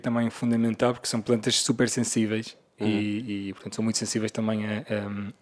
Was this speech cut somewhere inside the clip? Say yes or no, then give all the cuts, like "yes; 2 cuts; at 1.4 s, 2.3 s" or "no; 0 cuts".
no; 0 cuts